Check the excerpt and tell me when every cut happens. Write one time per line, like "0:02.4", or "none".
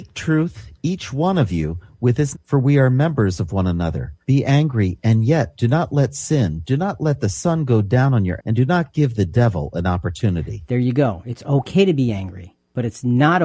0:02.3
0:04.2
0:08.4